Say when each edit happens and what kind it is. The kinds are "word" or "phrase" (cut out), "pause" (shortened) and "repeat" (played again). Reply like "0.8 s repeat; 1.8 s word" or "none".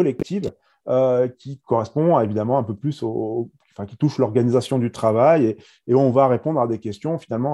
none